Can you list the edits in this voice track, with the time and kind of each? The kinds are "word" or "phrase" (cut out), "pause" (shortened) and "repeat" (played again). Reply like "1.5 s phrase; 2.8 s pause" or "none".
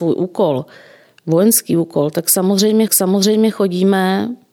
2.9 s repeat